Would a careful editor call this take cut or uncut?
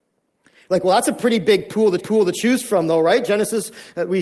cut